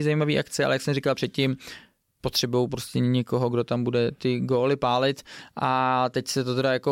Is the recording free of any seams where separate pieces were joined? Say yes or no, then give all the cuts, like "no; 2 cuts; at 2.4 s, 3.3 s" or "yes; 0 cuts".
yes; 0 cuts